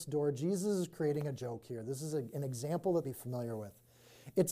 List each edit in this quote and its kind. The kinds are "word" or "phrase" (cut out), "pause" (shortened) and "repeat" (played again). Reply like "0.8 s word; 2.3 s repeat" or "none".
3.0 s word